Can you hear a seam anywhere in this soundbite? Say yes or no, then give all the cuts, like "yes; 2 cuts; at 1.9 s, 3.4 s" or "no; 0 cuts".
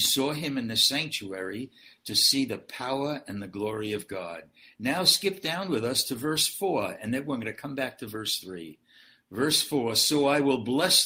no; 0 cuts